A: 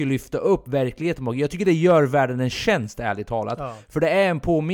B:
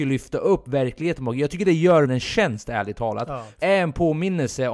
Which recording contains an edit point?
B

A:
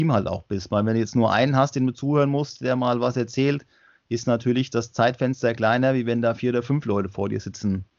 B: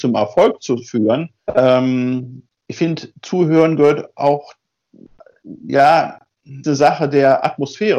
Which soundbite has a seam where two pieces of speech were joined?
B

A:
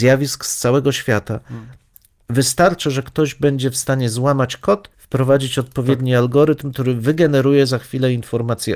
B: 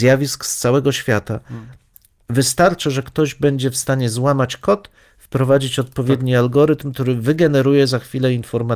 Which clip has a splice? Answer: A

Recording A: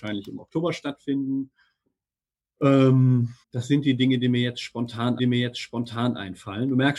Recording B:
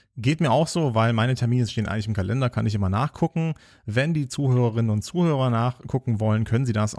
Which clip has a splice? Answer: A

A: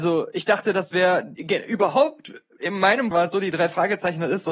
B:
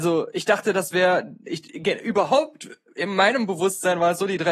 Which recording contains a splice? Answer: A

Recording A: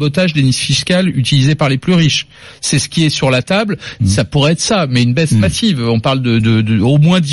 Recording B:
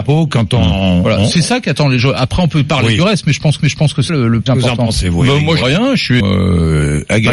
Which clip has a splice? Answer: B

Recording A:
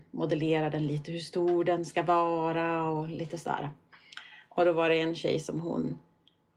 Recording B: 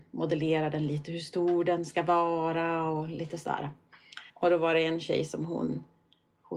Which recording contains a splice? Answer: B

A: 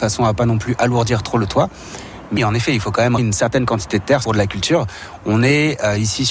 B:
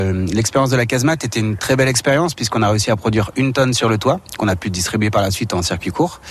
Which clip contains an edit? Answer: A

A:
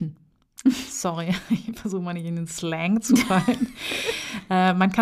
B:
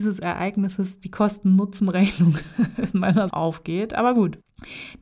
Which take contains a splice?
B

